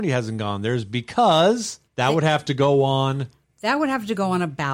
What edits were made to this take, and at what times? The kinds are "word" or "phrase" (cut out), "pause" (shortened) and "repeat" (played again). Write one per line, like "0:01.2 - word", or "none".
0:01.9 - pause